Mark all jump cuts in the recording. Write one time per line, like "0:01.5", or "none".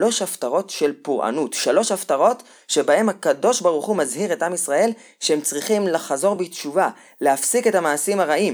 none